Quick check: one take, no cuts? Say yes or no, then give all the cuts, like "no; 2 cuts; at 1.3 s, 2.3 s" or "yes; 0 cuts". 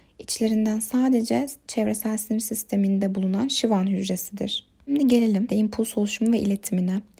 no; 1 cut; at 5.5 s